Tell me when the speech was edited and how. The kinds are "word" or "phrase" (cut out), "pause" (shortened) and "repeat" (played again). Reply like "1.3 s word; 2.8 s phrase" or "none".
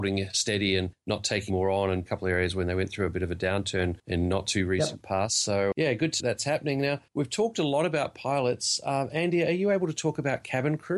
1.5 s word; 2.1 s phrase; 5.7 s word; 6.2 s phrase; 7.1 s pause